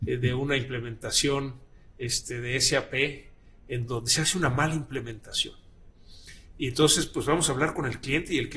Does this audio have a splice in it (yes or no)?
no